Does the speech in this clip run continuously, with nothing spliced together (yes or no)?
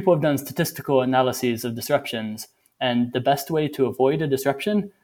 yes